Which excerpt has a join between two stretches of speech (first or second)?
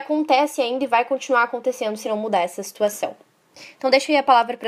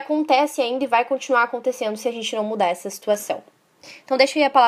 first